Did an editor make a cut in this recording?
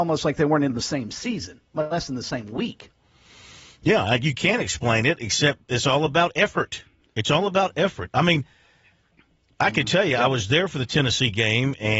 no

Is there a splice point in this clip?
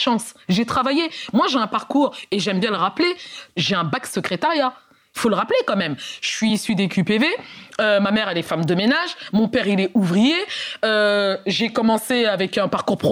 no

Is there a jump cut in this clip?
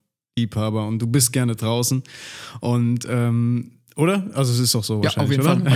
no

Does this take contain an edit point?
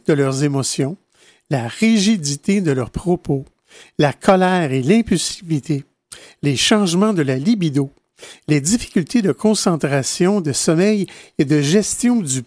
no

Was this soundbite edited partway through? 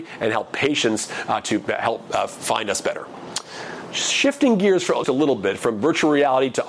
yes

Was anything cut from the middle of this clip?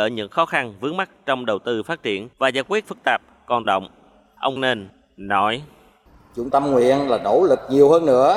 yes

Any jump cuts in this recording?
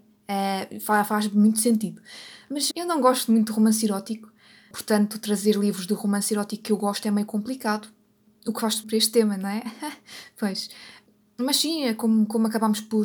yes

